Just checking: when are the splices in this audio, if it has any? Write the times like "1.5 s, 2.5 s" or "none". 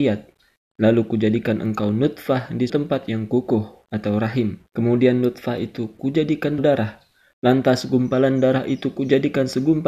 2.7 s, 4.7 s, 6.6 s